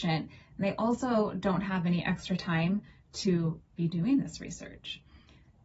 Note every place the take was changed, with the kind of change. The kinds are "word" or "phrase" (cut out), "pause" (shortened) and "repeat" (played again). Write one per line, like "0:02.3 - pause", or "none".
none

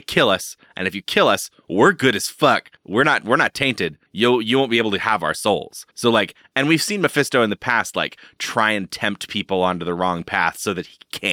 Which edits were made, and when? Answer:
0:02.8 - pause
0:04.1 - pause
0:05.9 - pause

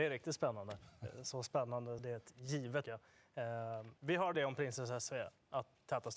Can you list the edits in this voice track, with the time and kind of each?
0:02.0 - phrase
0:02.8 - phrase
0:04.0 - pause
0:04.3 - word

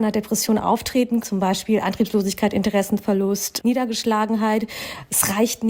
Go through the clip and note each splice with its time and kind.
0:01.2 - word
0:03.6 - word

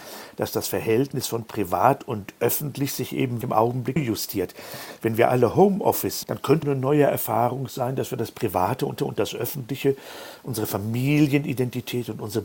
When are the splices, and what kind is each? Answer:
0:03.4 - word
0:04.0 - word
0:06.2 - word
0:06.6 - word
0:09.0 - repeat

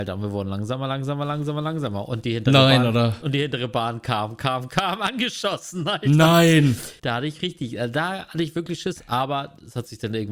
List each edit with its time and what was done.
0:07.0 - pause

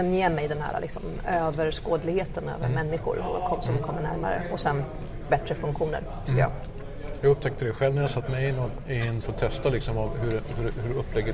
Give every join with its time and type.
0:05.3 - word
0:09.2 - phrase

